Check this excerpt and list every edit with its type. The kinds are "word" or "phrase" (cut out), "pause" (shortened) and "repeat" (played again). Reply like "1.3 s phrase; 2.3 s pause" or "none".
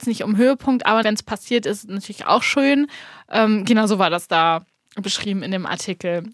1.0 s word